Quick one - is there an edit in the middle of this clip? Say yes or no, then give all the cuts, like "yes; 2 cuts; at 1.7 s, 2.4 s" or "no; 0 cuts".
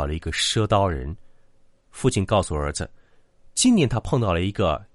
no; 0 cuts